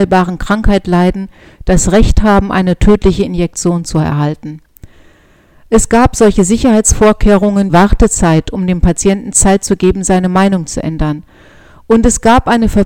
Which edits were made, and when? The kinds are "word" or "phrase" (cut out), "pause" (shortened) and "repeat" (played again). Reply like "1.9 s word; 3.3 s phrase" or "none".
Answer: 7.7 s phrase